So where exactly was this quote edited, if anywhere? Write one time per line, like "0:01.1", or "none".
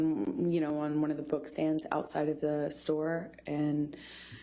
none